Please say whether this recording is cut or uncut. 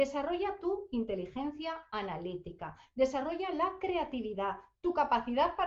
uncut